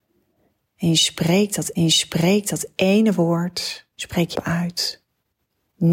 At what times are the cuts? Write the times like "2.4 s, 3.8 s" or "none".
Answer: 1.8 s, 3.9 s, 4.3 s